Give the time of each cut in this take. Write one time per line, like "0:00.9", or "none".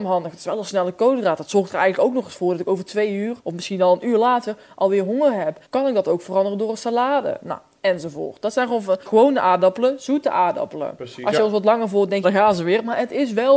0:03.4
0:05.7
0:09.1
0:12.2